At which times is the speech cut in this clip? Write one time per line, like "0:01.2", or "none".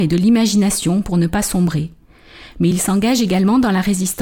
none

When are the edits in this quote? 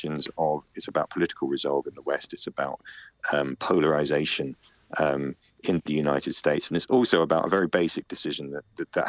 none

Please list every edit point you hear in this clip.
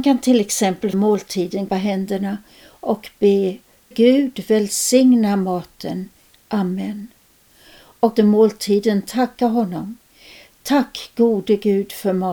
0:00.9
0:01.7
0:03.9
0:08.2

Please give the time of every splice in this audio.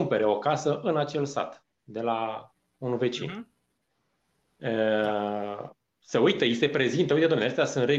none

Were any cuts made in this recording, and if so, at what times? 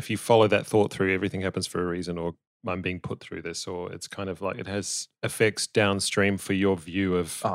none

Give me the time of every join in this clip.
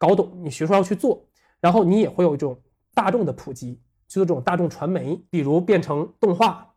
none

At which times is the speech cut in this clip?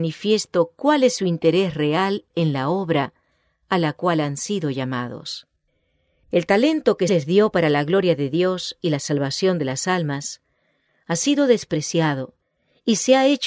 0:07.1

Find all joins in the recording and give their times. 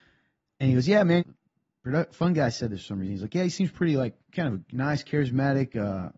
0:01.2
0:04.2

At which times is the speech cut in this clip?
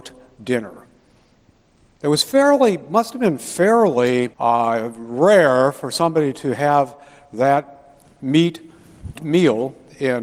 0:04.3
0:09.2

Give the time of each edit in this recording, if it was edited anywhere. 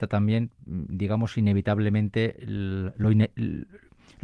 none

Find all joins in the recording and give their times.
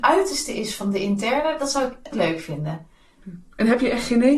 0:02.1

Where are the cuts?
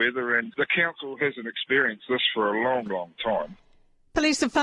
none

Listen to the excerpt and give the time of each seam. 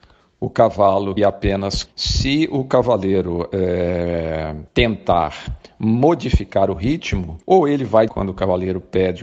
0:01.2
0:01.9
0:04.7
0:07.4
0:08.1

